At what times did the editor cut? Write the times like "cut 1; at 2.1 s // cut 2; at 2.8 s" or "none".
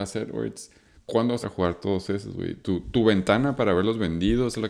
cut 1; at 1.4 s